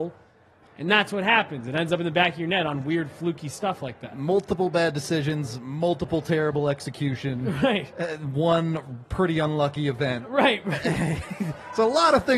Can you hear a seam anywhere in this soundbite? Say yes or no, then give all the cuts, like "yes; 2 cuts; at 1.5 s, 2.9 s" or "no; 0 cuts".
no; 0 cuts